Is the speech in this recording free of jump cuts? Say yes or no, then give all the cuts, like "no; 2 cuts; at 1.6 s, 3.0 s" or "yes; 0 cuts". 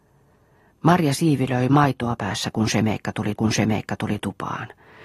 no; 2 cuts; at 2.2 s, 3.4 s